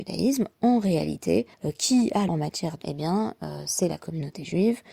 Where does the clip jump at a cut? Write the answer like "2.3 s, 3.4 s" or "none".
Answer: 1.5 s, 2.3 s, 2.8 s